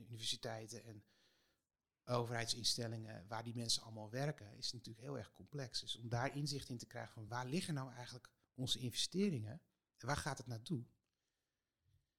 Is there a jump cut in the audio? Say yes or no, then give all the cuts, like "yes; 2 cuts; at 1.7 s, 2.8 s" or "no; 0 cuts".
no; 0 cuts